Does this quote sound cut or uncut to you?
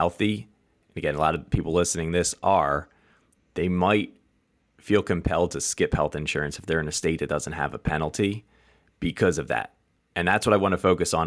uncut